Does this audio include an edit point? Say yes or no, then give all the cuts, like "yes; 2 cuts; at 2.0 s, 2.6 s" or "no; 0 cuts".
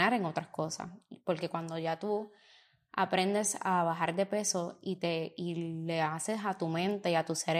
no; 0 cuts